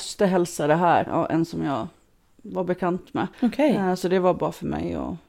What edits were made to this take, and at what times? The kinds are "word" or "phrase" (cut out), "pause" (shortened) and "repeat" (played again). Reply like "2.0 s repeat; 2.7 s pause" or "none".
1.1 s word; 3.3 s pause